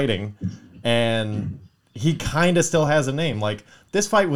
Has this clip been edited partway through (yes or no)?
no